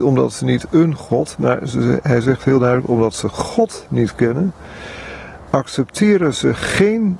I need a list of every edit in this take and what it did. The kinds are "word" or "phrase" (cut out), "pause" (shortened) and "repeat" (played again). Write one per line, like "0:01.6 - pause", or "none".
none

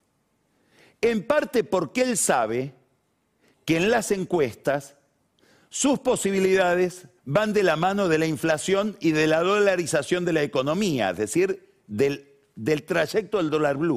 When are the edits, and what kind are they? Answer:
0:07.2 - pause

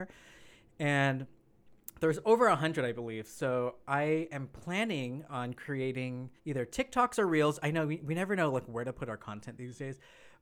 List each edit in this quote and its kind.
0:06.4 - pause

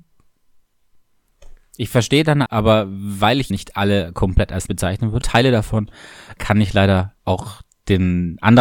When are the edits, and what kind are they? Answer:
0:02.5 - word
0:03.5 - word
0:04.7 - word
0:05.2 - phrase
0:06.4 - word
0:07.2 - pause

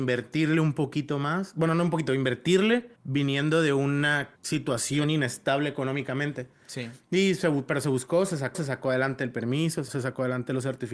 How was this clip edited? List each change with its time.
0:03.0 - pause
0:04.4 - pause
0:08.5 - repeat
0:09.9 - word

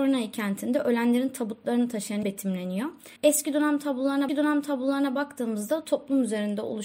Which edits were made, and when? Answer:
0:02.2 - phrase
0:03.2 - pause
0:04.3 - repeat

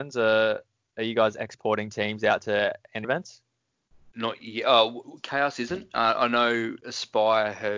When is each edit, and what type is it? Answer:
0:03.0 - word

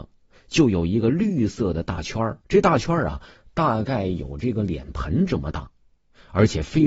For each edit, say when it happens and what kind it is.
0:02.4 - pause

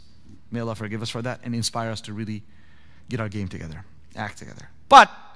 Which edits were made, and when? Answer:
none

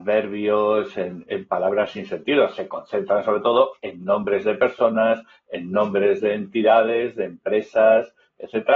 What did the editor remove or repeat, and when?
none

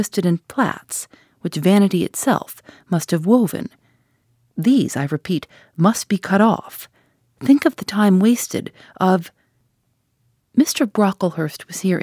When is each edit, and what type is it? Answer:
none

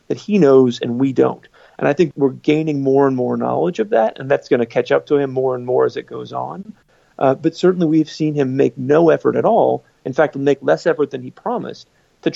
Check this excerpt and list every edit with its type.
0:02.1 - word

